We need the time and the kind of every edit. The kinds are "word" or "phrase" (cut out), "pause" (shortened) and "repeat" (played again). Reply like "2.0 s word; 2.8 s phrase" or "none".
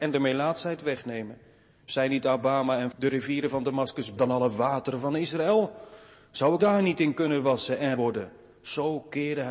2.9 s word; 4.2 s word; 6.6 s word; 8.0 s word